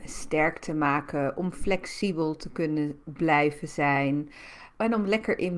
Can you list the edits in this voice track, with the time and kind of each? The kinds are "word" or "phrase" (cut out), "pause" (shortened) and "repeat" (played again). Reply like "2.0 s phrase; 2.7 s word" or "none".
none